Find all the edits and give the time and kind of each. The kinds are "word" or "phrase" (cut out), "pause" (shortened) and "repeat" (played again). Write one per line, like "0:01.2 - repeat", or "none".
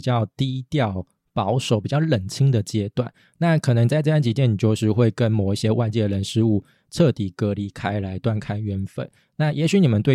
none